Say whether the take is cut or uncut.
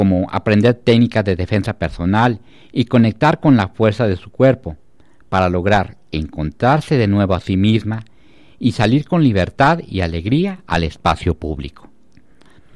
uncut